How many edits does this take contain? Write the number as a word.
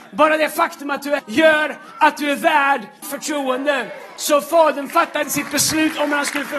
three